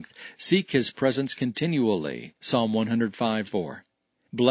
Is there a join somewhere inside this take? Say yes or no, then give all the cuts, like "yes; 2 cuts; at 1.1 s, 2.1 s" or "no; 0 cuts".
yes; 1 cut; at 3.5 s